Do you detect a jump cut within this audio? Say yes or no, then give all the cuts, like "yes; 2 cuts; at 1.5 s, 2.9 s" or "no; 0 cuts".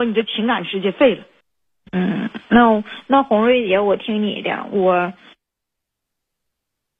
yes; 1 cut; at 1.4 s